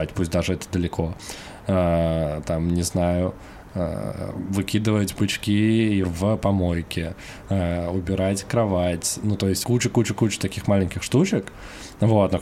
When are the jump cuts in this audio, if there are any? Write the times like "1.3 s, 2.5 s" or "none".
6.0 s, 9.6 s